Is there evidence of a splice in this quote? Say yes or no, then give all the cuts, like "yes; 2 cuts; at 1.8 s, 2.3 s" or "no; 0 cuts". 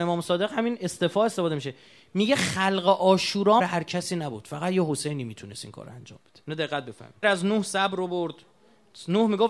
yes; 3 cuts; at 3.6 s, 6.4 s, 7.2 s